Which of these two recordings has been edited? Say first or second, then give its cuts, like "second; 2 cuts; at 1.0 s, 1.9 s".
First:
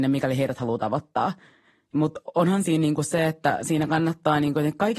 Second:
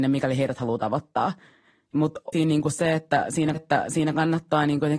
second; 2 cuts; at 2.3 s, 3.5 s